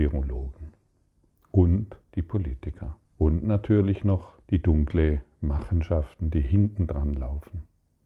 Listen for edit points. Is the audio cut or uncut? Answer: cut